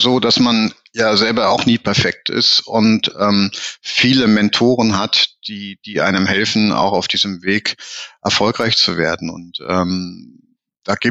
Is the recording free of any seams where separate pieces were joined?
yes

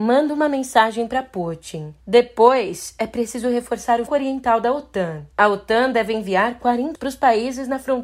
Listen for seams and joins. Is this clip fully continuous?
no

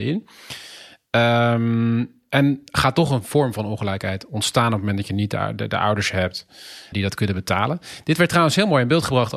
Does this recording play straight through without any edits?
no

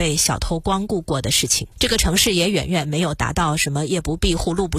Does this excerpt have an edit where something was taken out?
yes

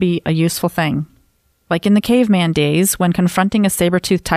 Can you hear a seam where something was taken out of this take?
no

